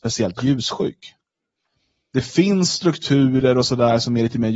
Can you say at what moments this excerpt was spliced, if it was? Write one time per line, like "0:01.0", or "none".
none